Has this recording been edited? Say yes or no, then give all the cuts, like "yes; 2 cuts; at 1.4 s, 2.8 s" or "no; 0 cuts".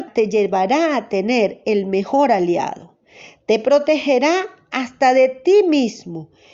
no; 0 cuts